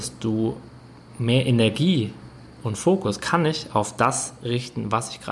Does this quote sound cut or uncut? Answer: uncut